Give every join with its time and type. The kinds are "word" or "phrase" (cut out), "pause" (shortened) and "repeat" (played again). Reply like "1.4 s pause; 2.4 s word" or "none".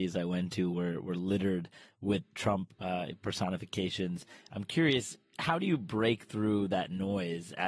none